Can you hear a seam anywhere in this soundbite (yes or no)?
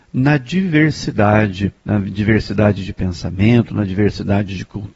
yes